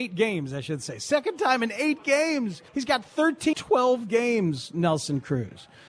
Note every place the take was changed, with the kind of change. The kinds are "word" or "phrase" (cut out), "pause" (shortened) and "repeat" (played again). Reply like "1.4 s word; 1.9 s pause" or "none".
2.7 s pause; 3.5 s phrase